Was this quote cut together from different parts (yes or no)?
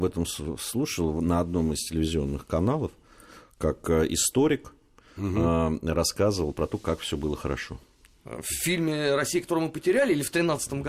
no